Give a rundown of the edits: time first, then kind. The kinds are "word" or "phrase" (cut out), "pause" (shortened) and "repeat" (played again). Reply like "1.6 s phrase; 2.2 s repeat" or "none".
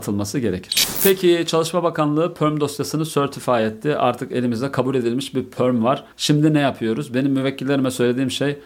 6.1 s pause